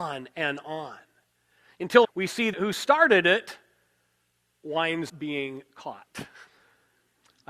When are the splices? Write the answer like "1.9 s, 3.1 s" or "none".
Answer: 2.0 s, 2.5 s, 5.1 s, 6.5 s